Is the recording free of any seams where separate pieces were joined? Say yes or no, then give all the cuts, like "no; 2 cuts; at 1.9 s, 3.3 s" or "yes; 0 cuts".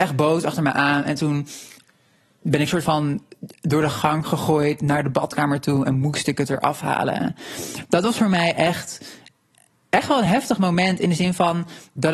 yes; 0 cuts